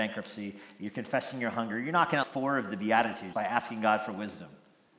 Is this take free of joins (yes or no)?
no